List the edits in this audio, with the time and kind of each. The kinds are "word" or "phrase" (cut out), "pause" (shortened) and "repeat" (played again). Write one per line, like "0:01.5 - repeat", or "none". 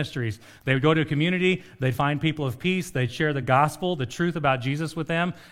none